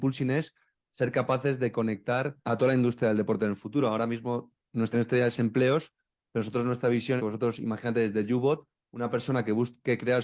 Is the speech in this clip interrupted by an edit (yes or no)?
yes